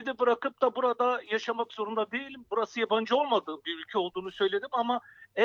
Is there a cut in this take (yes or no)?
no